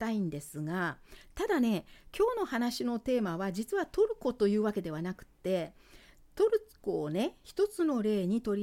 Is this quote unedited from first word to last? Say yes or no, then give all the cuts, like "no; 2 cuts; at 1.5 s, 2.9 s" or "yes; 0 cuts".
yes; 0 cuts